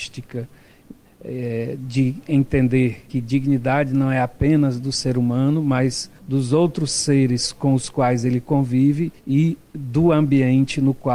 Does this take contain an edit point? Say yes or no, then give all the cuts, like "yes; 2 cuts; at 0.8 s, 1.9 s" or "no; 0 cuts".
yes; 3 cuts; at 3.1 s, 6.2 s, 9.2 s